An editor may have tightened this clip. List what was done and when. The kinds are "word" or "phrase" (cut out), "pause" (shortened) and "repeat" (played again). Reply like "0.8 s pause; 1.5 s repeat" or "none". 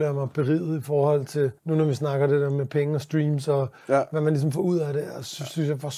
1.6 s pause